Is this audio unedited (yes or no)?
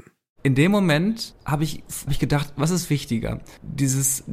no